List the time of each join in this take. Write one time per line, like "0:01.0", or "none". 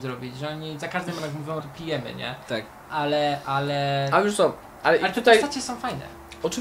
0:01.2
0:01.6